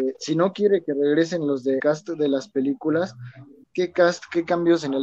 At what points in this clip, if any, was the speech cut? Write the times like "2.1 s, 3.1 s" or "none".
1.8 s, 3.6 s